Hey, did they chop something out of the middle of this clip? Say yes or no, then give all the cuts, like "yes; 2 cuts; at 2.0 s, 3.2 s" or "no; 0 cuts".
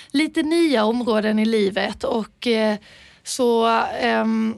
no; 0 cuts